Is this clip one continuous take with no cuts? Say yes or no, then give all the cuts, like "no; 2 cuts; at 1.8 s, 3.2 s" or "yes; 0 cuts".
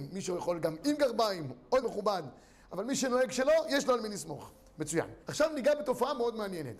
no; 2 cuts; at 1.8 s, 5.2 s